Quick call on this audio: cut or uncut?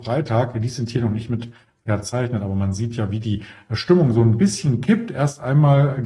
uncut